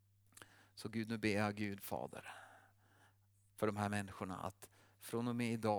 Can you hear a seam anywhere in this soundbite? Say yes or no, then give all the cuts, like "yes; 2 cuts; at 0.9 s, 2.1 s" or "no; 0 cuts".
no; 0 cuts